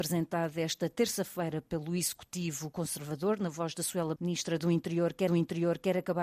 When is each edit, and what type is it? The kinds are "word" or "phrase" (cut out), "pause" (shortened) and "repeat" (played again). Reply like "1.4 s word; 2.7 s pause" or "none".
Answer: 4.2 s word; 5.3 s repeat